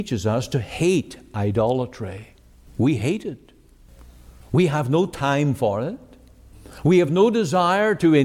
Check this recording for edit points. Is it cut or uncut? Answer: uncut